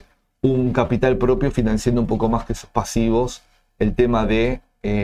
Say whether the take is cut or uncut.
uncut